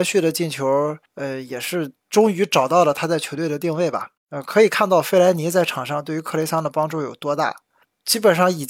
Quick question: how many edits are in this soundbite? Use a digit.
1